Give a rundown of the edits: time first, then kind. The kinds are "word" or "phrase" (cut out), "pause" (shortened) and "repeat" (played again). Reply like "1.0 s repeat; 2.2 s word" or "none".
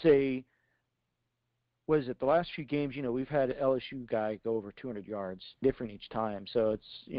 5.6 s phrase